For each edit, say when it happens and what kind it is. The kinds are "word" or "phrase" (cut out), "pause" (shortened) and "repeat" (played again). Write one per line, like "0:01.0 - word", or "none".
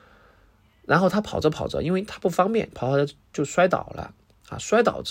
none